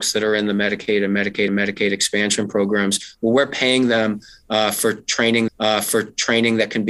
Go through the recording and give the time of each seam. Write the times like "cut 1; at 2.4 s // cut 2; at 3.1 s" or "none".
cut 1; at 1.5 s // cut 2; at 5.5 s